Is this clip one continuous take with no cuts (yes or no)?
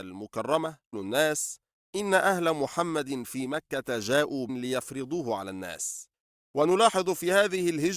no